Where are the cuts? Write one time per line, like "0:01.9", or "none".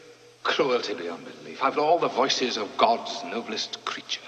0:01.7

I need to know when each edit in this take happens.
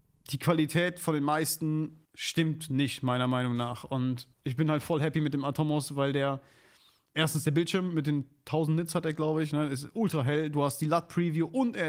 0:02.0
0:04.3

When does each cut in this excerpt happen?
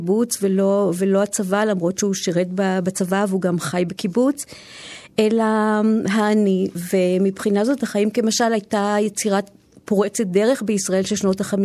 none

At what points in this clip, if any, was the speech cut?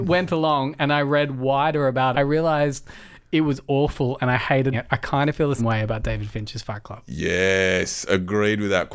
0:02.1
0:04.7
0:05.6

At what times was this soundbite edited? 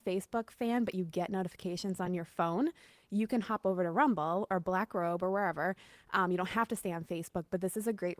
none

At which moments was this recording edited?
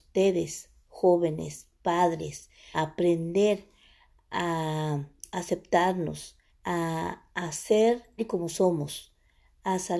0:02.7
0:06.5
0:08.2

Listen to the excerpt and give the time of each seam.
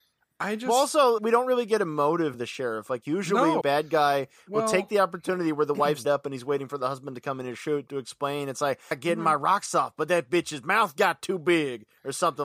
0:01.2
0:02.3
0:03.6
0:06.0
0:08.9

